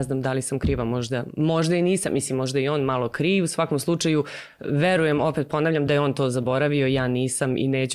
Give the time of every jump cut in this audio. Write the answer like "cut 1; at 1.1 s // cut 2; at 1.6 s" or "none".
none

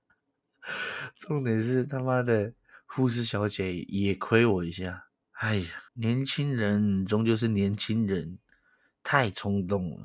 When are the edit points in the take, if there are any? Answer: cut 1; at 5.9 s

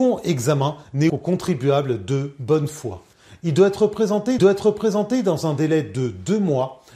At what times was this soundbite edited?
cut 1; at 1.1 s // cut 2; at 4.4 s

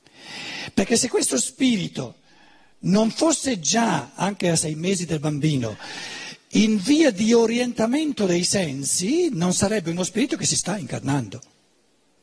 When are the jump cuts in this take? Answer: none

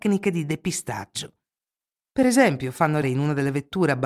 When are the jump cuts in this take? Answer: cut 1; at 3.0 s

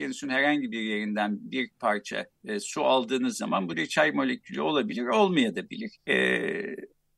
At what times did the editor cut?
cut 1; at 2.4 s // cut 2; at 3.7 s // cut 3; at 6.0 s

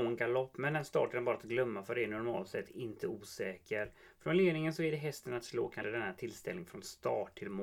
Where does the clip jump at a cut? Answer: cut 1; at 5.8 s

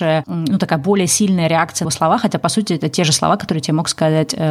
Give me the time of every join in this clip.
cut 1; at 1.8 s

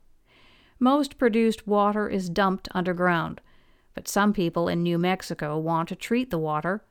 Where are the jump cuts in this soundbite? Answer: none

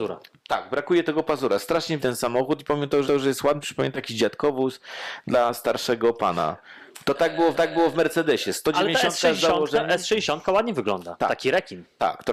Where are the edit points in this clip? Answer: cut 1; at 2.0 s // cut 2; at 3.0 s // cut 3; at 3.6 s // cut 4; at 7.5 s

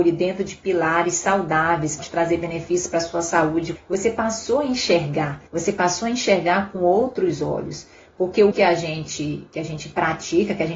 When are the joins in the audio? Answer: cut 1; at 2.0 s // cut 2; at 3.8 s // cut 3; at 5.5 s // cut 4; at 8.5 s

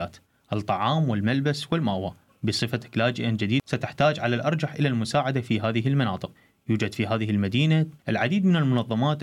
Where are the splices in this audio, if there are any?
cut 1; at 8.0 s

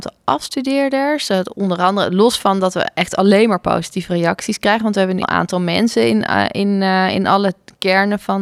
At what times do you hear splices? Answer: cut 1; at 5.2 s

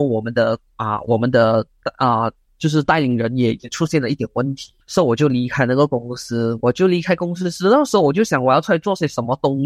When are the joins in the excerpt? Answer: cut 1; at 4.8 s

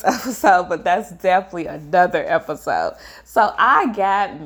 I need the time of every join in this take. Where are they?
none

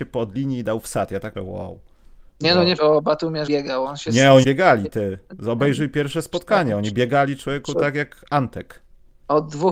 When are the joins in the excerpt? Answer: cut 1; at 1.3 s // cut 2; at 2.8 s // cut 3; at 3.5 s // cut 4; at 4.4 s

